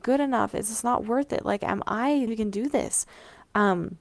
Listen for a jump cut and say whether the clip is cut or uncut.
cut